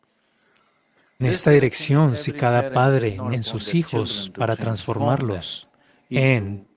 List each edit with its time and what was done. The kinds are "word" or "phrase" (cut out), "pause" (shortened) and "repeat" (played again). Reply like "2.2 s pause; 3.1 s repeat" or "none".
1.2 s word; 3.3 s word